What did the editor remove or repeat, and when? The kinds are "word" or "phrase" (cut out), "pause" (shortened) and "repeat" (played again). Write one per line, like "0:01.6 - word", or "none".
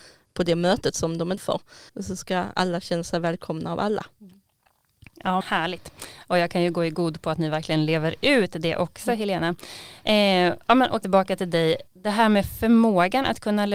0:01.4 - word
0:01.9 - pause
0:04.1 - pause
0:05.4 - word
0:11.0 - word
0:11.9 - pause